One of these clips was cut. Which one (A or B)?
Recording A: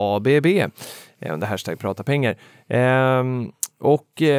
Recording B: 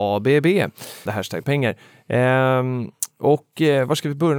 B